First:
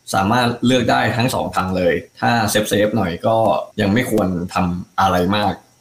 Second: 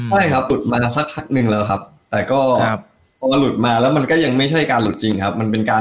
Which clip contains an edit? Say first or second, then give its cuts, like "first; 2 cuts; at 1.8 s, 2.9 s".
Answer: first; 2 cuts; at 2.1 s, 3.7 s